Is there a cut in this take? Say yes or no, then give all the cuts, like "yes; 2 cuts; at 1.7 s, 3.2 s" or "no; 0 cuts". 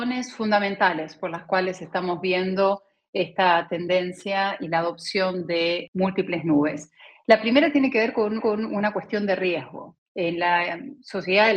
yes; 1 cut; at 8.4 s